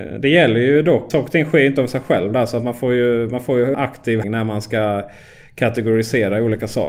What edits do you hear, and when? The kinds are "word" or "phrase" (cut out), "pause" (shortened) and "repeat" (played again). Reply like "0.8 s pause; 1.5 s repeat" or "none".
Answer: 1.1 s word; 3.7 s word; 4.2 s word